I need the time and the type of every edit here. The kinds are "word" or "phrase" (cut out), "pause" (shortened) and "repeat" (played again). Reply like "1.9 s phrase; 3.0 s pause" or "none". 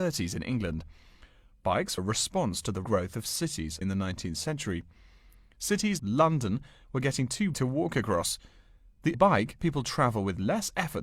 2.0 s word; 2.8 s word; 3.8 s word; 6.0 s word; 7.5 s word; 9.1 s word; 9.6 s word